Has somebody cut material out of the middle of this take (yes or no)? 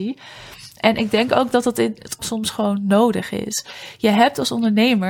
yes